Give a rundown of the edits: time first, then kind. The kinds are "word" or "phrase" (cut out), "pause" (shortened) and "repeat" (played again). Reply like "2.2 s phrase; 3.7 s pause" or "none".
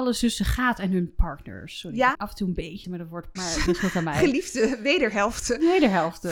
2.1 s word; 2.8 s word; 3.4 s word; 3.7 s word